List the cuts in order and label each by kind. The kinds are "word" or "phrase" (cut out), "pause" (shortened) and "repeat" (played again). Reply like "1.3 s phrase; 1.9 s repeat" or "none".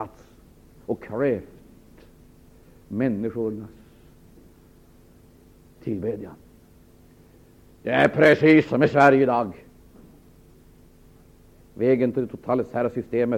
none